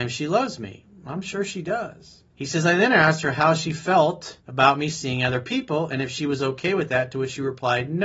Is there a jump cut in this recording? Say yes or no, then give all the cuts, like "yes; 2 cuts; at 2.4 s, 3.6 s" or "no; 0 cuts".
yes; 2 cuts; at 2.3 s, 4.4 s